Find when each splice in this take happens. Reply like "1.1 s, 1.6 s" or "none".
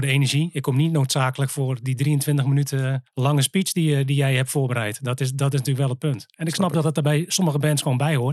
3.1 s